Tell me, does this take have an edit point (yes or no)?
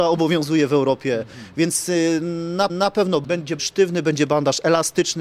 yes